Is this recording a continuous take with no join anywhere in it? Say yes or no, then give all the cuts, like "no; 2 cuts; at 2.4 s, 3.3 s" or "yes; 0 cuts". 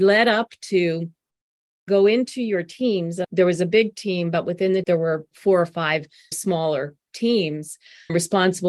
no; 2 cuts; at 4.8 s, 5.3 s